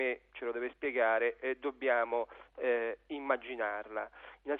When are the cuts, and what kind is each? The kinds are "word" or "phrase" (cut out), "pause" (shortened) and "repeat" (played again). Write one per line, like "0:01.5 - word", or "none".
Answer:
none